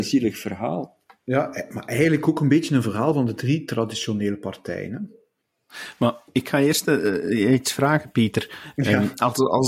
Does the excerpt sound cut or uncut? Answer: uncut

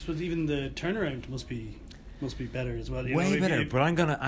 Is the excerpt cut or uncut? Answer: uncut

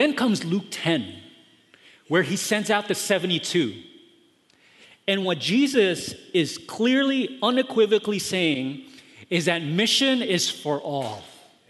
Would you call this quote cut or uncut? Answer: uncut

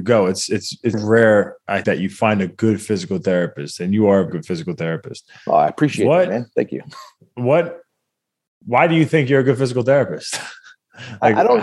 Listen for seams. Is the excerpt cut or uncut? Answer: cut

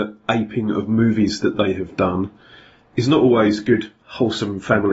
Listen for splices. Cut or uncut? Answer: uncut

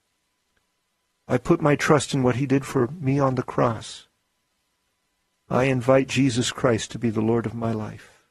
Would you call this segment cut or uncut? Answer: uncut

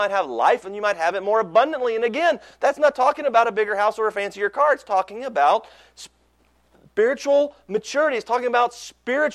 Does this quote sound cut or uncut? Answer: uncut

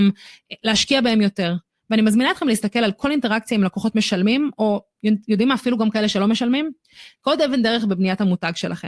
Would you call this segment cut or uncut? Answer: uncut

